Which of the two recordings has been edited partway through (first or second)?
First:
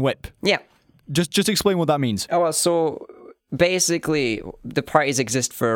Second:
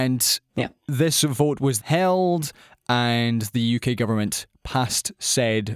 second